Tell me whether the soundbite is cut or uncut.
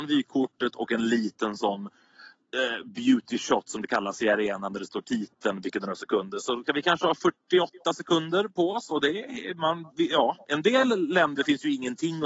uncut